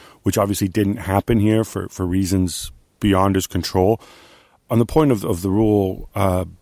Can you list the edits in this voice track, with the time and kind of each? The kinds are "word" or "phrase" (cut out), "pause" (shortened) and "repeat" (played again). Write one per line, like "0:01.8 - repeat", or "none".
none